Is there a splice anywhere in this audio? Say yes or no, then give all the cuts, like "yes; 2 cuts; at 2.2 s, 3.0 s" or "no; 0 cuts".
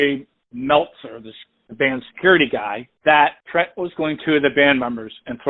yes; 1 cut; at 4.2 s